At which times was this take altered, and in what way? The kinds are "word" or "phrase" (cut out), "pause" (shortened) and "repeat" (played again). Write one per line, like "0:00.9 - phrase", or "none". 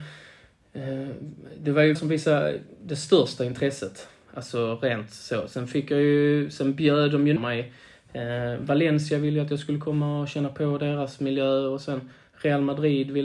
0:02.0 - word
0:07.4 - word